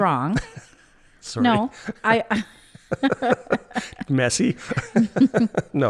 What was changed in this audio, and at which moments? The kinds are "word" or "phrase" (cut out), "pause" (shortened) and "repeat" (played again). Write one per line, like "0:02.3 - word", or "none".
none